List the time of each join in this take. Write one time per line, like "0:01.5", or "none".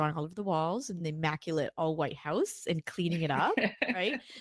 none